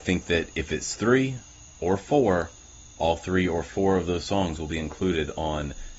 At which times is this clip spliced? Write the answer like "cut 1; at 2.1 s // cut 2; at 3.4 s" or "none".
cut 1; at 1.6 s